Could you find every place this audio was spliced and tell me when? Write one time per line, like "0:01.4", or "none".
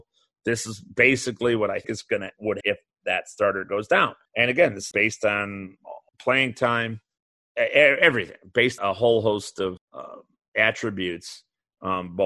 0:01.8
0:02.6
0:04.2
0:04.9
0:06.1
0:07.2
0:08.8
0:09.8